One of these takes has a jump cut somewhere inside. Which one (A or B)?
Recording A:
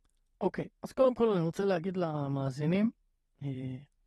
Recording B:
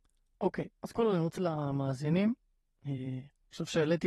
B